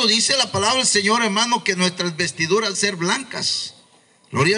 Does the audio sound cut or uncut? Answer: cut